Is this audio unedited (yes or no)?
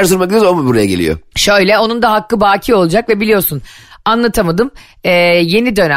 yes